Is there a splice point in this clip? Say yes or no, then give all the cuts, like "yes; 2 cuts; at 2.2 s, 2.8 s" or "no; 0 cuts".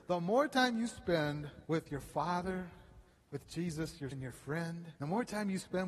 yes; 4 cuts; at 1.6 s, 3.1 s, 4.1 s, 5.0 s